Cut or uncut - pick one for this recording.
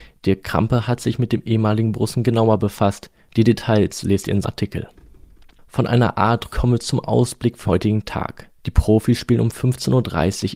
cut